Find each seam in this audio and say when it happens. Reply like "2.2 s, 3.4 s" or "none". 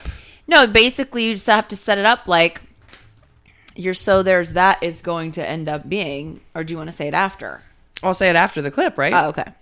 none